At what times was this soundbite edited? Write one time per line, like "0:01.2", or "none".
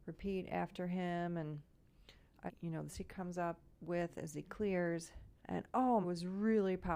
0:02.5
0:02.9
0:05.4
0:06.0